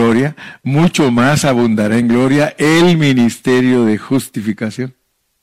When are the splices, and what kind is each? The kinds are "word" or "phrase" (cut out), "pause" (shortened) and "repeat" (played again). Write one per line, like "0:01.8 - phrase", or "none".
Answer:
none

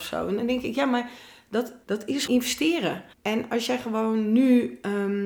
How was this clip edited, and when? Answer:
0:01.8 - pause
0:02.3 - word
0:03.1 - pause

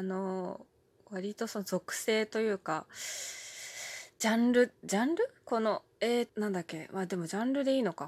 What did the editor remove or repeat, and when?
0:06.3 - word

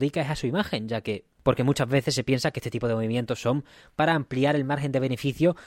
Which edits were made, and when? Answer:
none

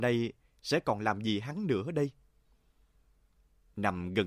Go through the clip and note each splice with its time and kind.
none

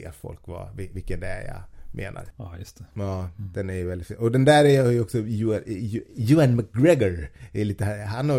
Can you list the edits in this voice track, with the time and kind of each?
0:02.3 - pause

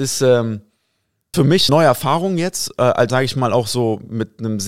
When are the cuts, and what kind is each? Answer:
0:01.3 - phrase
0:01.7 - word
0:03.1 - word

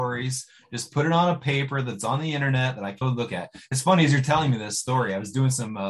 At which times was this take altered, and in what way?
0:03.0 - word

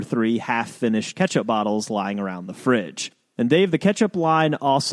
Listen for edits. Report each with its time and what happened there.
none

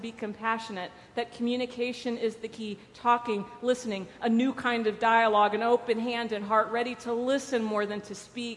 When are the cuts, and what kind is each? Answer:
none

